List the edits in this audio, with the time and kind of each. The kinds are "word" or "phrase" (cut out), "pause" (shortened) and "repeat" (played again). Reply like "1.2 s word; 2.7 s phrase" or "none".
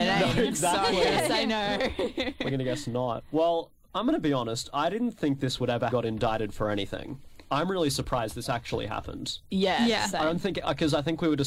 5.9 s phrase